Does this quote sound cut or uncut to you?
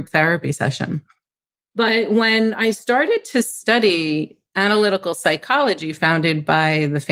uncut